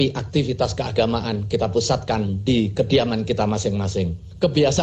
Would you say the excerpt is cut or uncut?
uncut